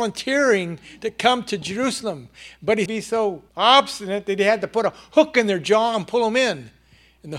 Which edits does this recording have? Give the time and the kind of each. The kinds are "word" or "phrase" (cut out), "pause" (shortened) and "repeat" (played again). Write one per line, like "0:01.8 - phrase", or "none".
0:02.9 - phrase
0:03.5 - pause